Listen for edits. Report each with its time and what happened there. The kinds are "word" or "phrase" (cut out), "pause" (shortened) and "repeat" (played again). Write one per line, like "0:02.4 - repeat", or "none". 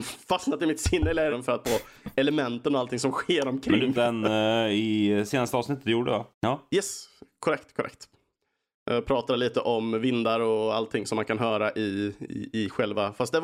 0:01.3 - phrase
0:01.6 - phrase
0:03.9 - phrase
0:05.3 - word
0:06.3 - pause